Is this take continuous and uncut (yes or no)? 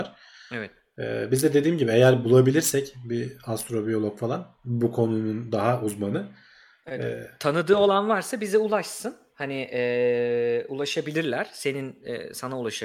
yes